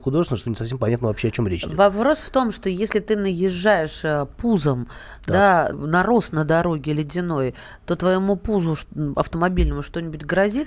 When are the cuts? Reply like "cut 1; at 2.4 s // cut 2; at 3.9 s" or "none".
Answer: cut 1; at 5.7 s